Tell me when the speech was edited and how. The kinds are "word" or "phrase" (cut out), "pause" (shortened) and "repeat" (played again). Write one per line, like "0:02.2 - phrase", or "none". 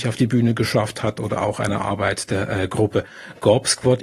none